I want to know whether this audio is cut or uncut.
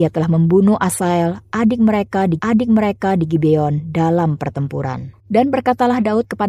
cut